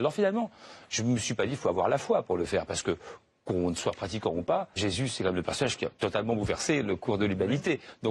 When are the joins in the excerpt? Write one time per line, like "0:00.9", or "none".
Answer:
0:04.8